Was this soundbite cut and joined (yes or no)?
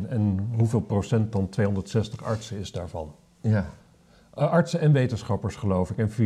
no